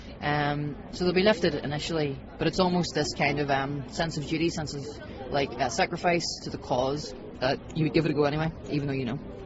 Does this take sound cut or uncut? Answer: uncut